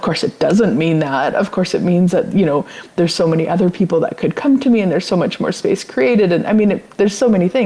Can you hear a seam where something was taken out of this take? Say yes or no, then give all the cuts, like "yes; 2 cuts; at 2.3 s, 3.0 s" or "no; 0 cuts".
no; 0 cuts